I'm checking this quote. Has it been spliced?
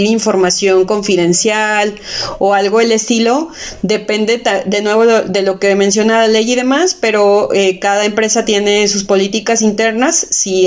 no; 0 cuts

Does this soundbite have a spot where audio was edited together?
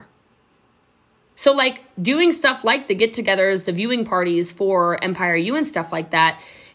no; 0 cuts

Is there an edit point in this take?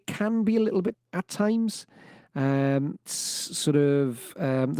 yes; 2 cuts; at 0.9 s, 3.1 s

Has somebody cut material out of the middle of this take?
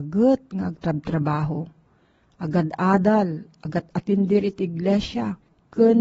no; 0 cuts

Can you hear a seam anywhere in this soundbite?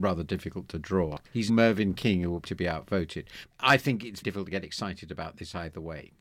yes; 4 cuts; at 1.5 s, 2.4 s, 3.5 s, 4.2 s

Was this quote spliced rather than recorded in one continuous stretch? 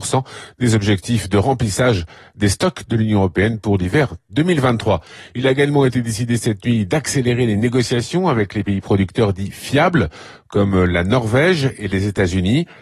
no; 0 cuts

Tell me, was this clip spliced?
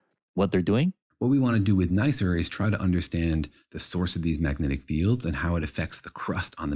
no; 0 cuts

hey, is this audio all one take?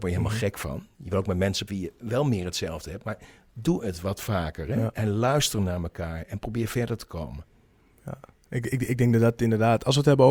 no; 1 cut; at 1.7 s

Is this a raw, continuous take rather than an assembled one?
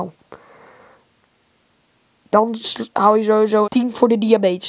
no; 1 cut; at 3.7 s

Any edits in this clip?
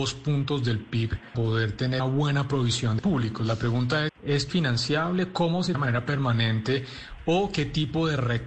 yes; 6 cuts; at 1.3 s, 2.0 s, 3.0 s, 4.1 s, 4.5 s, 5.7 s

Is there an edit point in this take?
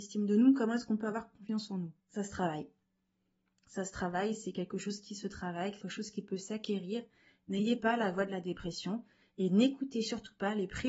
yes; 3 cuts; at 2.0 s, 5.8 s, 7.8 s

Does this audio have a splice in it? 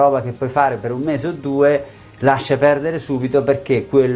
no; 0 cuts

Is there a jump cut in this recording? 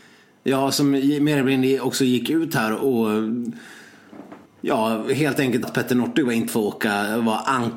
yes; 3 cuts; at 4.5 s, 5.6 s, 6.5 s

